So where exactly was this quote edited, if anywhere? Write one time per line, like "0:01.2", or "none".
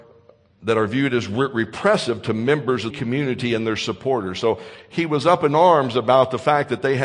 0:02.9